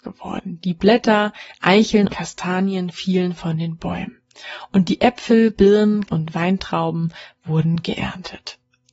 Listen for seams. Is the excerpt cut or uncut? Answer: cut